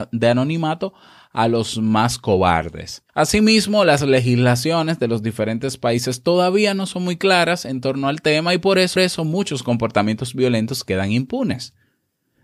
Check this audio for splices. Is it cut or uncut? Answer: cut